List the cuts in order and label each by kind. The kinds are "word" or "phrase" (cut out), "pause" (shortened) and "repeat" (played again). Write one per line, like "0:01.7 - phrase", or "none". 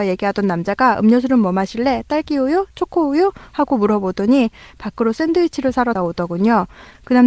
0:05.9 - word